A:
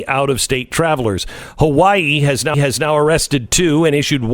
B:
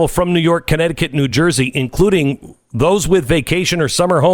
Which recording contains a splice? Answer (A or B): A